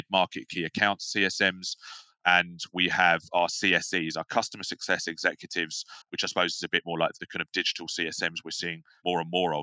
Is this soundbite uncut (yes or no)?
no